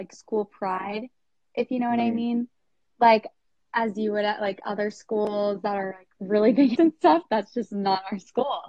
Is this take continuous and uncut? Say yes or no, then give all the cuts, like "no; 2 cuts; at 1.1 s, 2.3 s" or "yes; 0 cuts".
no; 2 cuts; at 3.5 s, 6.8 s